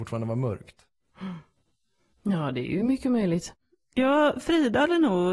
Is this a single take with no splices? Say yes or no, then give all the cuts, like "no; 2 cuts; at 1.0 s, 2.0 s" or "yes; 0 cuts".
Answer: yes; 0 cuts